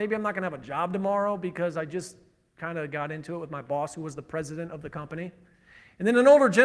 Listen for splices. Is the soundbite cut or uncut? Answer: uncut